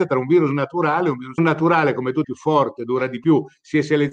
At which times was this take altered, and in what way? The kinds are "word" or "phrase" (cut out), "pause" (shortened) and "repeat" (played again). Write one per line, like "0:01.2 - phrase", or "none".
0:01.4 - phrase
0:02.2 - phrase

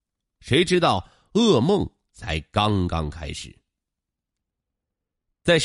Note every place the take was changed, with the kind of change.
none

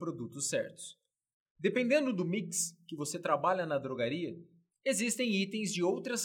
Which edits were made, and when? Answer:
none

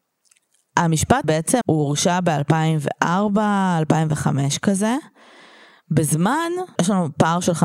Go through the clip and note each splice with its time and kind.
0:01.2 - word
0:01.6 - word
0:06.8 - word

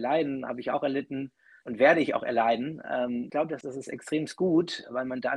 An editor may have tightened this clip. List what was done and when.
0:01.6 - word
0:02.2 - word
0:03.3 - word
0:03.6 - word

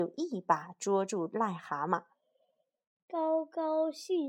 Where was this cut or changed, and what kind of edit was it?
none

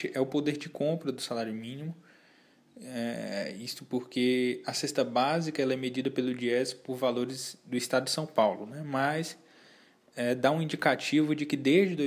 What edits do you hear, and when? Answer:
none

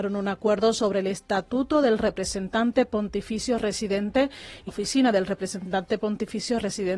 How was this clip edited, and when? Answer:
0:04.7 - word

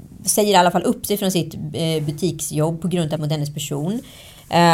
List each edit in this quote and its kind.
0:03.2 - word

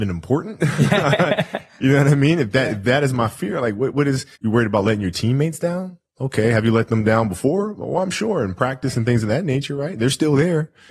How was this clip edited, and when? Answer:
0:04.4 - pause

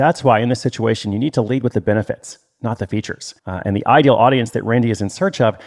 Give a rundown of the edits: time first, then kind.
0:03.4 - pause

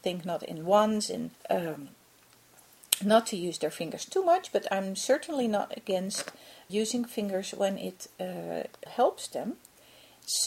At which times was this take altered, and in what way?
0:01.3 - pause
0:06.7 - word
0:08.9 - word

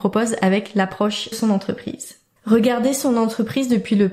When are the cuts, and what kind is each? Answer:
0:01.3 - phrase
0:02.4 - pause

